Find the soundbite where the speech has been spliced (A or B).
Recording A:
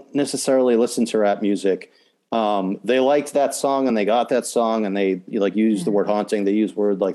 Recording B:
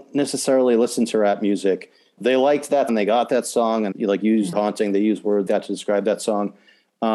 B